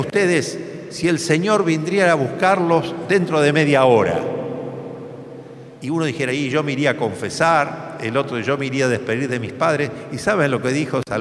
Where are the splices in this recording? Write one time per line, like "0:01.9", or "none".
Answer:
none